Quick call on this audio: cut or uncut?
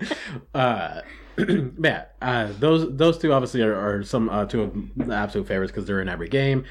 uncut